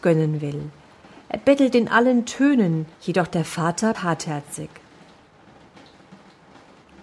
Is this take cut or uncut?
cut